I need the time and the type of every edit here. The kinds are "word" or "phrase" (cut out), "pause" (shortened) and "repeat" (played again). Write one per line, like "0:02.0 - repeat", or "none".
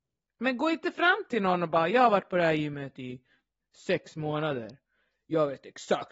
none